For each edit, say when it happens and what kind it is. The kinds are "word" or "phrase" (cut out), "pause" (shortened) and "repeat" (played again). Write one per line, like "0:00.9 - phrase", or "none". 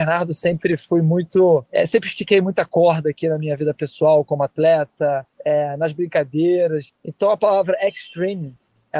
0:01.7 - pause
0:05.3 - pause
0:07.0 - pause